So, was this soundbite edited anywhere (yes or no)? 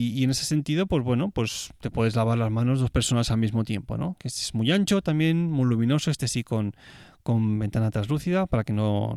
no